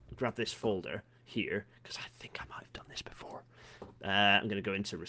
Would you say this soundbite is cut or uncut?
uncut